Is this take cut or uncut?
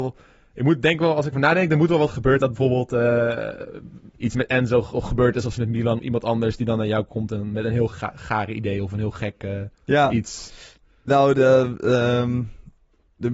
cut